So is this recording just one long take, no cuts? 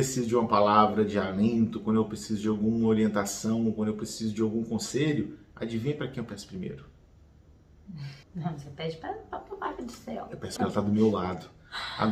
no; 2 cuts; at 8.2 s, 10.6 s

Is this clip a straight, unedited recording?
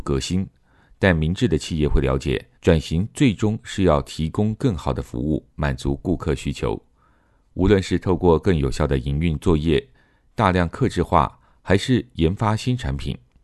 no; 1 cut; at 2.5 s

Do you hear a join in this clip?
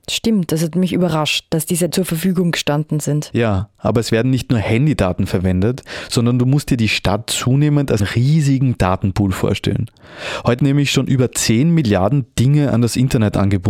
yes; 3 cuts; at 1.9 s, 8.0 s, 10.6 s

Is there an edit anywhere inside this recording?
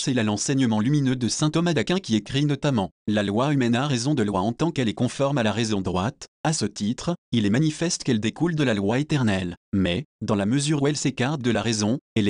no; 0 cuts

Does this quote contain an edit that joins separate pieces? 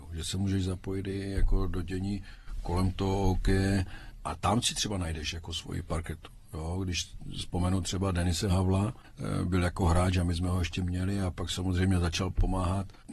no; 0 cuts

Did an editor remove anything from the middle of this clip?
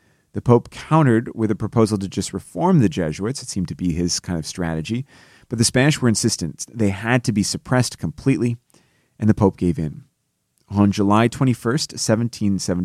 no; 0 cuts

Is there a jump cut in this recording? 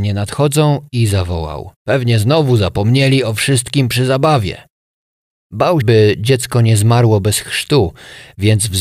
yes; 2 cuts; at 1.8 s, 5.8 s

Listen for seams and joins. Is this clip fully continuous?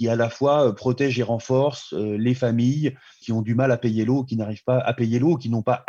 yes; 0 cuts

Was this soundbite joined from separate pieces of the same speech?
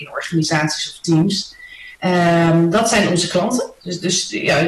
yes; 1 cut; at 1.9 s

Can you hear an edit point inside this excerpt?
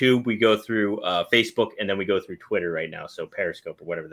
no; 0 cuts

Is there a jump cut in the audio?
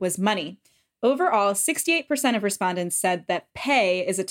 no; 0 cuts

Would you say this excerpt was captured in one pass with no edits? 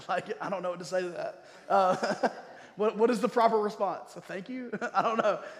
yes; 0 cuts

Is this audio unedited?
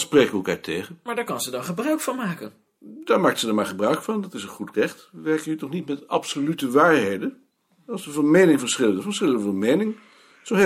yes; 0 cuts

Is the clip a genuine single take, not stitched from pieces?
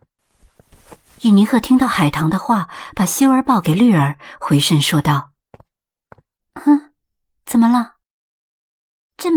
yes; 0 cuts

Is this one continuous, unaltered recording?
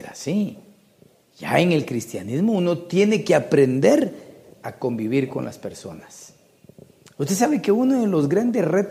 yes; 0 cuts

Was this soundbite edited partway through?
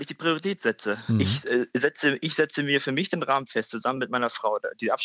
no; 0 cuts

